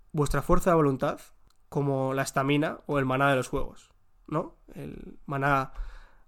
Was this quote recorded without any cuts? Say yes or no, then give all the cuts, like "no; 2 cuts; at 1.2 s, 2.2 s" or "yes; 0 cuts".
yes; 0 cuts